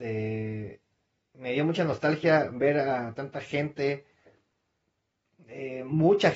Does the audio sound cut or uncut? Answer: uncut